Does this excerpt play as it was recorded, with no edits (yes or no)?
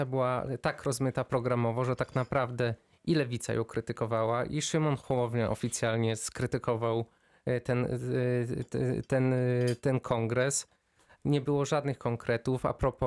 yes